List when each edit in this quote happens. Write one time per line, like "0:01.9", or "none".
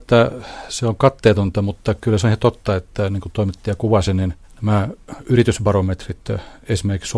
none